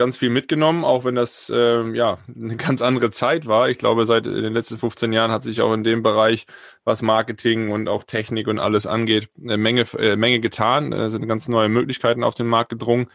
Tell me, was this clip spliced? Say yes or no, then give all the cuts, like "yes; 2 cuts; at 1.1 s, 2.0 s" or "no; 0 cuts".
no; 0 cuts